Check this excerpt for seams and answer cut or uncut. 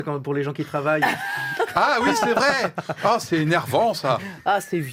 uncut